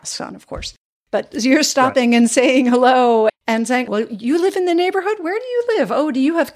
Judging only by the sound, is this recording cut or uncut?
cut